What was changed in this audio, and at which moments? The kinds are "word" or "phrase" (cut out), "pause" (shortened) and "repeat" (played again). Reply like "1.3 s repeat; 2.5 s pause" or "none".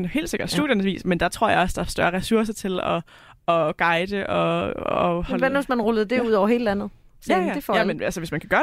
none